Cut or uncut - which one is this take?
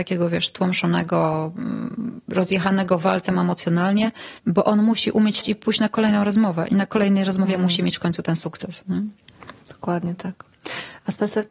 cut